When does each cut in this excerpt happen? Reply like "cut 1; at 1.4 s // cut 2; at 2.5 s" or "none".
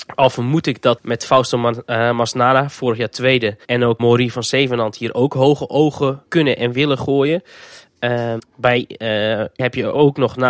cut 1; at 1.0 s // cut 2; at 3.6 s // cut 3; at 4.0 s // cut 4; at 6.3 s // cut 5; at 8.4 s // cut 6; at 9.6 s